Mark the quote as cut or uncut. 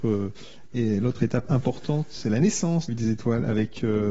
cut